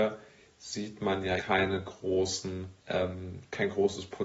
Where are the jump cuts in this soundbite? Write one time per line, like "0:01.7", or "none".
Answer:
0:01.4
0:02.8